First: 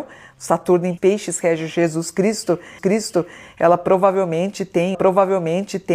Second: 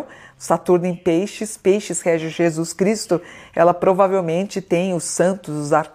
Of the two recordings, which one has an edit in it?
first; 3 cuts; at 1.0 s, 2.8 s, 4.9 s

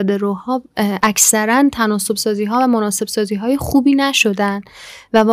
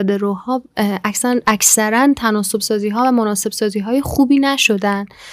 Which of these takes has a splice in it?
first; 1 cut; at 1.0 s

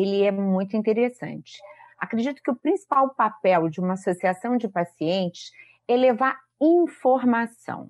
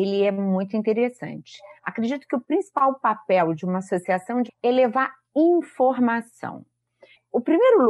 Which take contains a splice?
second; 2 cuts; at 1.8 s, 4.5 s

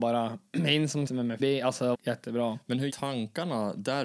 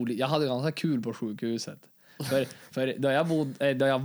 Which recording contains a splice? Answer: first; 4 cuts; at 1.1 s, 1.4 s, 1.9 s, 2.9 s

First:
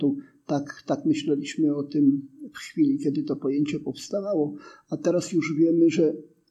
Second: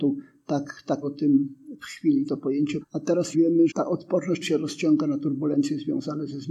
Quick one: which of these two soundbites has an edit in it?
second; 6 cuts; at 1.0 s, 2.3 s, 2.8 s, 3.3 s, 3.7 s, 4.4 s

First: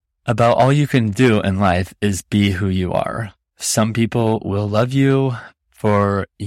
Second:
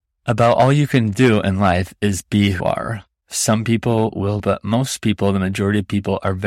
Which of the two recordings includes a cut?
second; 2 cuts; at 2.6 s, 4.4 s

